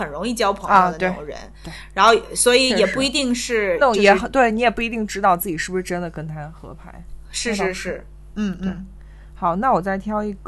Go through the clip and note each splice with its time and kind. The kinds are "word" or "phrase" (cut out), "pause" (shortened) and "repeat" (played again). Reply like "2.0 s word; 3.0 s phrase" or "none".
none